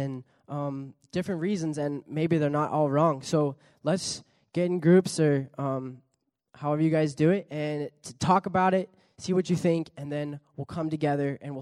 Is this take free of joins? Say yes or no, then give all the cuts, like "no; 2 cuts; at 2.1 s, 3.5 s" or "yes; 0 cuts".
yes; 0 cuts